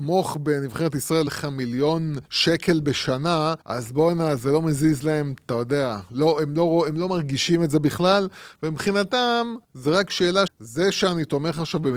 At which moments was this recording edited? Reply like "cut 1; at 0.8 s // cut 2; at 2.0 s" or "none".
cut 1; at 1.3 s // cut 2; at 2.3 s // cut 3; at 3.6 s // cut 4; at 9.6 s // cut 5; at 10.5 s